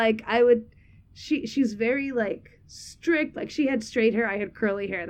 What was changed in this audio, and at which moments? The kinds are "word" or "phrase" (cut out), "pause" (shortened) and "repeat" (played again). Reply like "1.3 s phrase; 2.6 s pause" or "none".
none